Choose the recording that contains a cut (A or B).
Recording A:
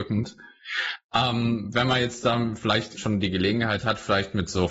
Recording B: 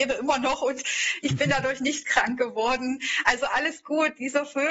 A